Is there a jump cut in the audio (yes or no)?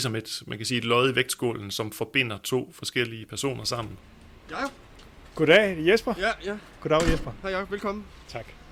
no